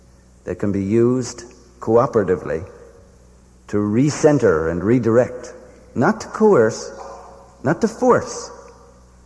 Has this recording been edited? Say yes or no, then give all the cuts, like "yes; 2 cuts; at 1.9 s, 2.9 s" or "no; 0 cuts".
no; 0 cuts